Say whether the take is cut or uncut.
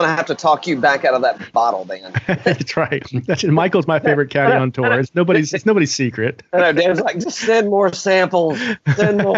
uncut